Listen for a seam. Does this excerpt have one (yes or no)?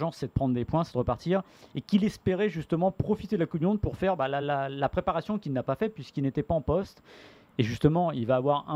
no